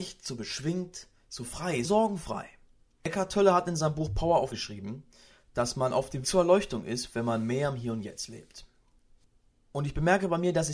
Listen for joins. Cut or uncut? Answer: cut